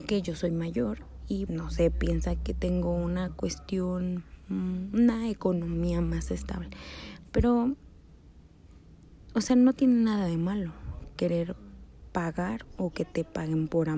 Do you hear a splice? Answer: yes; 1 cut; at 1.5 s

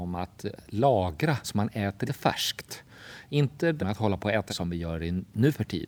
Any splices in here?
yes; 4 cuts; at 1.4 s, 2.1 s, 3.8 s, 4.5 s

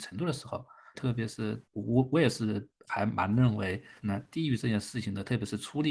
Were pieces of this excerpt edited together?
yes; 3 cuts; at 0.9 s, 1.6 s, 4.0 s

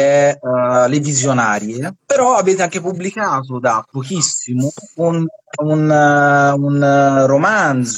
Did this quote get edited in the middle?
yes; 1 cut; at 2.0 s

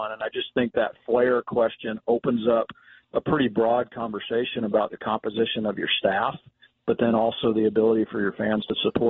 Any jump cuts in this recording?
no; 0 cuts

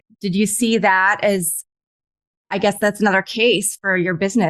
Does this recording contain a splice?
no; 0 cuts

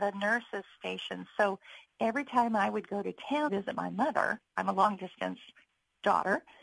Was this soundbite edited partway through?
yes; 1 cut; at 3.5 s

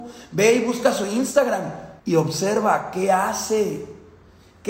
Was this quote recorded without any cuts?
no; 1 cut; at 2.0 s

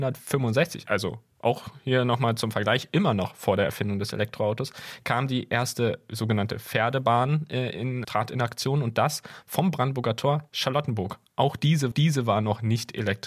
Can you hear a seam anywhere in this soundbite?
yes; 3 cuts; at 8.0 s, 10.5 s, 11.9 s

